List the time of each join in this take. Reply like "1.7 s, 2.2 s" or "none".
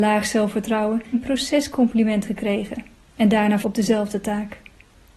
1.1 s, 2.2 s, 3.6 s

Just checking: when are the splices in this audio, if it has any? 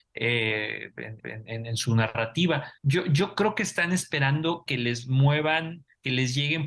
1.2 s, 2.8 s

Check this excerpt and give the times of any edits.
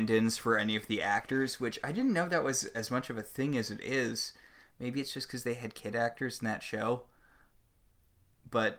none

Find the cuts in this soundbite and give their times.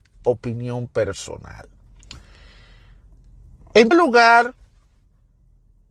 3.9 s

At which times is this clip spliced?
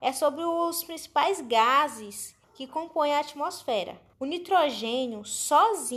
2.4 s, 4.1 s

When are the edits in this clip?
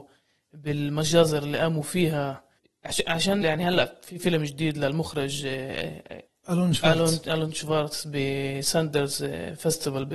3.4 s, 6.3 s

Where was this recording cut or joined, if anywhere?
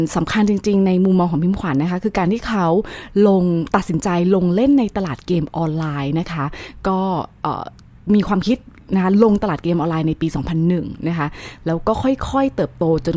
7.8 s

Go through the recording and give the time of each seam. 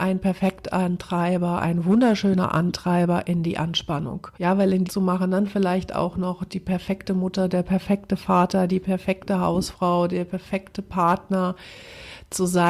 4.3 s, 4.8 s

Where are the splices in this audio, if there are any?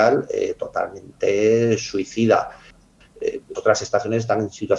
3.5 s

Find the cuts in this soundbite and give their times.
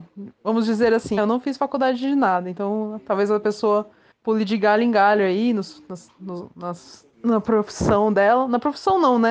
1.2 s, 4.1 s, 7.1 s

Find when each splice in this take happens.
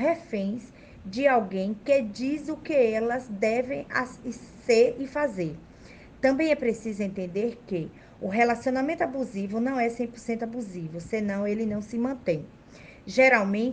none

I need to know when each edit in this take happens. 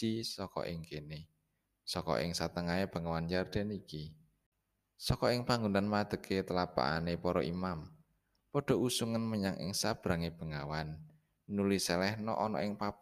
none

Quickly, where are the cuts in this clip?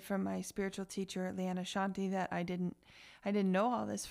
none

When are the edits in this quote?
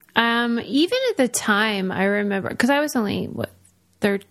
none

